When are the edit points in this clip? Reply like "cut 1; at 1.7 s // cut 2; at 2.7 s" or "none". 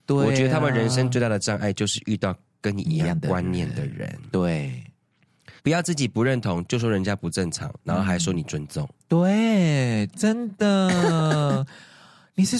cut 1; at 5.6 s